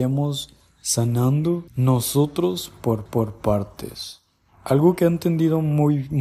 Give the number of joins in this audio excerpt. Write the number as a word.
two